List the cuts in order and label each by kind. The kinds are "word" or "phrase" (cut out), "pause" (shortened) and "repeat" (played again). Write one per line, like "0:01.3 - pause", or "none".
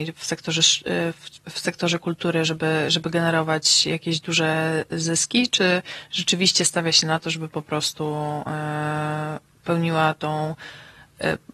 none